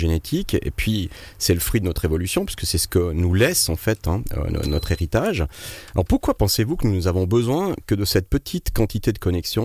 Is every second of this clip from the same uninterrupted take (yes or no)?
yes